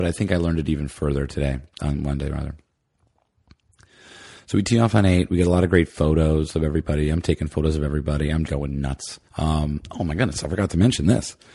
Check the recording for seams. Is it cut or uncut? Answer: cut